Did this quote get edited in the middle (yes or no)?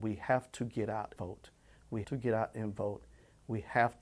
yes